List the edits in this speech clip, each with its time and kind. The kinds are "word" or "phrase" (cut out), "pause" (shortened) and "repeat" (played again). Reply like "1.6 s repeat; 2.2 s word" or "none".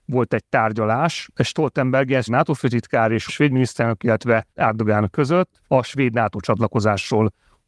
2.3 s word; 3.3 s phrase; 4.5 s pause; 5.6 s pause